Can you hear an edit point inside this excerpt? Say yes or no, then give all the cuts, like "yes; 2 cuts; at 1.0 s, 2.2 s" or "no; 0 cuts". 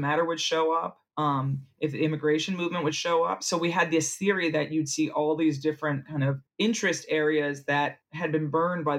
yes; 3 cuts; at 1.1 s, 6.5 s, 8.0 s